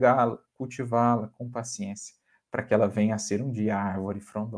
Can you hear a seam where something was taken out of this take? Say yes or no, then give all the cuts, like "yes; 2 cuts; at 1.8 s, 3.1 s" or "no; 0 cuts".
no; 0 cuts